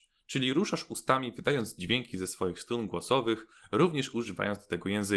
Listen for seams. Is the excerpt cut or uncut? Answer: uncut